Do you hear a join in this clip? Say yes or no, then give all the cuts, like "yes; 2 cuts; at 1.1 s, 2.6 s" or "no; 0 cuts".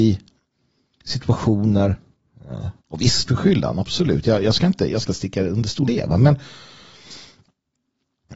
yes; 4 cuts; at 2.8 s, 3.3 s, 5.1 s, 5.9 s